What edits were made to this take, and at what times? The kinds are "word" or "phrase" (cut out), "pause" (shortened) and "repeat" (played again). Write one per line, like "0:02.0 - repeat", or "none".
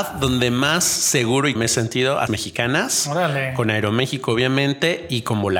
0:01.5 - word
0:02.3 - phrase